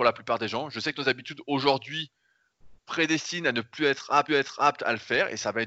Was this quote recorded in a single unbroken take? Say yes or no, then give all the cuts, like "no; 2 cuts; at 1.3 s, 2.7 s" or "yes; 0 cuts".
no; 2 cuts; at 2.8 s, 4.3 s